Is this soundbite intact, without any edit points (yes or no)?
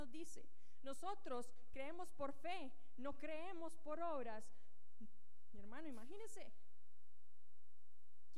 yes